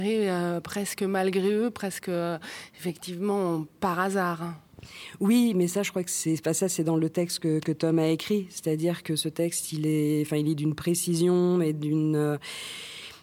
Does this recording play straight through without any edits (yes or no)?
yes